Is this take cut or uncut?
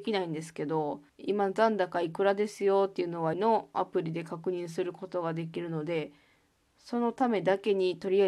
cut